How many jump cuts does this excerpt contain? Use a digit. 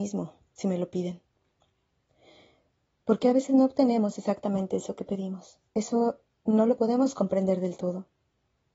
1